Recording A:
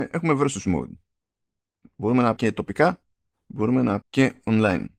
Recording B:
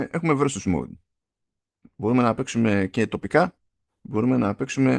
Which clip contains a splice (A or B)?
A